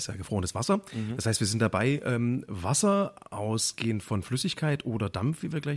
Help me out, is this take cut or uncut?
uncut